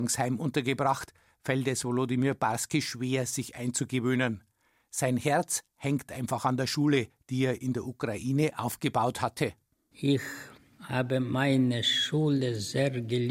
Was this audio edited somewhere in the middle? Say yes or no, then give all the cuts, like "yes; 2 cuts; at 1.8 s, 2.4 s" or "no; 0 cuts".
no; 0 cuts